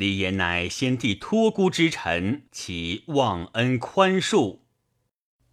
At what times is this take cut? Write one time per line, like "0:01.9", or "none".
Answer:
0:02.5